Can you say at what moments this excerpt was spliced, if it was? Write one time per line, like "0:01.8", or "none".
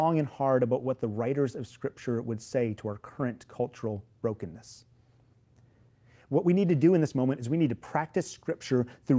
none